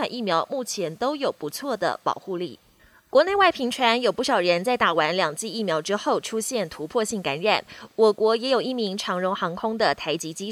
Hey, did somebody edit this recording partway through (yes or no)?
no